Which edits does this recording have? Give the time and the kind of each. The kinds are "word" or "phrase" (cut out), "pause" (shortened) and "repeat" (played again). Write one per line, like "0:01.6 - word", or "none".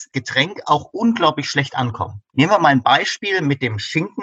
none

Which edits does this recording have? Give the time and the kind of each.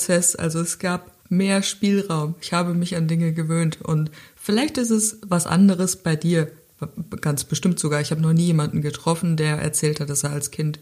0:01.2 - pause

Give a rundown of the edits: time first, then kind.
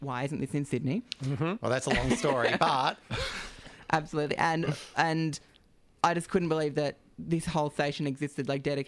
none

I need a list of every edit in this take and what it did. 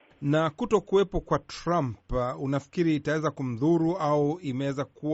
none

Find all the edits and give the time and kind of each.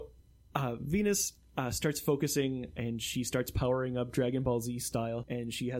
none

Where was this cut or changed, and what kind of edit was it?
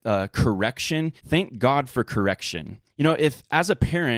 0:01.2 - pause
0:02.9 - pause

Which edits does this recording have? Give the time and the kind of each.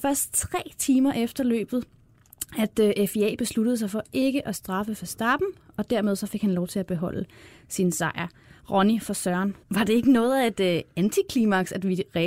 0:09.6 - pause

